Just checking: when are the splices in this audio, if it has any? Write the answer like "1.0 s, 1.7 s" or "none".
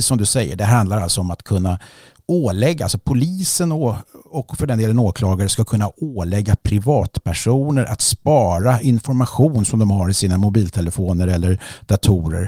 none